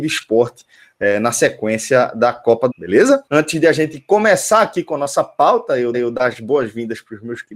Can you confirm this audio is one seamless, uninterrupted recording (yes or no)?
no